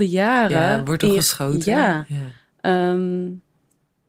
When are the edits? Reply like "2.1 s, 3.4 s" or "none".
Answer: none

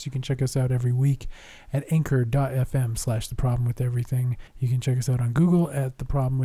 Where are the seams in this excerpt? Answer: 4.5 s

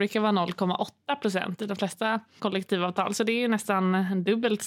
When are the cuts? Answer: 2.4 s

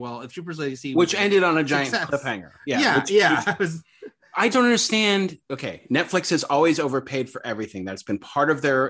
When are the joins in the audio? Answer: 4.5 s, 5.4 s

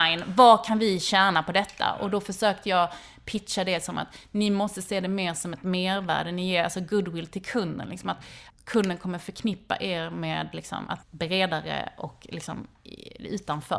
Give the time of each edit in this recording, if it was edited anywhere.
11.0 s

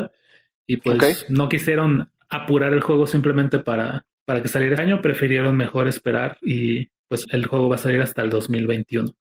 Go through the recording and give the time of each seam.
4.1 s, 4.8 s, 7.2 s

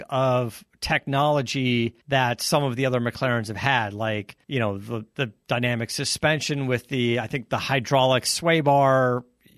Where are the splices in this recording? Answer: 2.0 s, 4.4 s

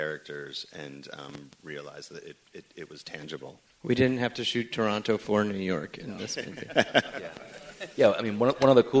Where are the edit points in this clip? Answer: 3.7 s

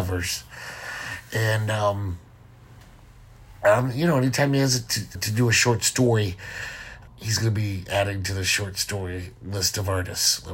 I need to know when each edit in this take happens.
5.1 s, 7.1 s

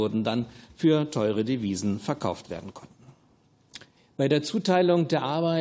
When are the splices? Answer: 4.0 s

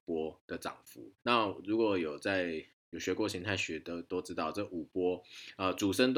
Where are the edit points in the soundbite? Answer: 1.2 s

